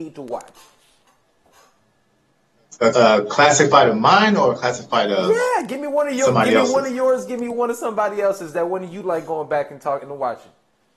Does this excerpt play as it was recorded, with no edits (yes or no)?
no